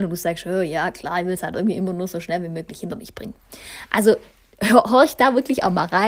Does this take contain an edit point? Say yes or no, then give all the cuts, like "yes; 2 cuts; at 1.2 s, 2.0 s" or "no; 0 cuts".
no; 0 cuts